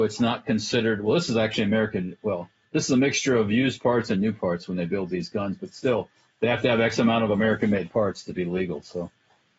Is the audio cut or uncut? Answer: cut